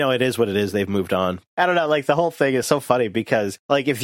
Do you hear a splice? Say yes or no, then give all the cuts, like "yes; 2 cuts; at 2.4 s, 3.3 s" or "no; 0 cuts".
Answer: no; 0 cuts